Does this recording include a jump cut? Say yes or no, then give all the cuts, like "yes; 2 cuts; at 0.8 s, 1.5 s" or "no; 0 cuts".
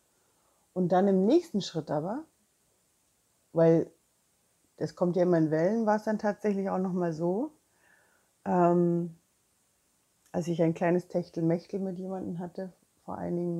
no; 0 cuts